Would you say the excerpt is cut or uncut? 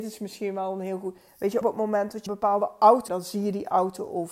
cut